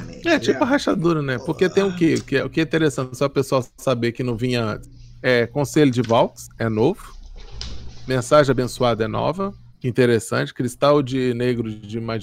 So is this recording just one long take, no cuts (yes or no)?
no